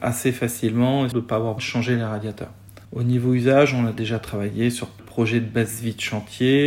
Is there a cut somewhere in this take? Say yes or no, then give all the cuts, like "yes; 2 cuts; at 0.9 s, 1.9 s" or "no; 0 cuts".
yes; 4 cuts; at 1.1 s, 1.6 s, 2.8 s, 5.0 s